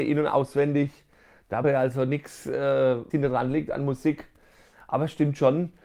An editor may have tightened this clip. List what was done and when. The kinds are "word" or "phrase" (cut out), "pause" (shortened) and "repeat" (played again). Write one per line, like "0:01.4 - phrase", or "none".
0:01.6 - word
0:03.1 - word